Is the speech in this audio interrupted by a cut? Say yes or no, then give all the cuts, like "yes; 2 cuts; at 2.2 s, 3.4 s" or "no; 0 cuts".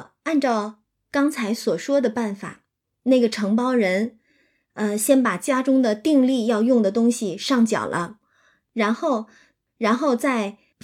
no; 0 cuts